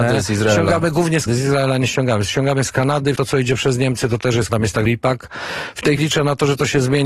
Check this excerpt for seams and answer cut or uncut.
cut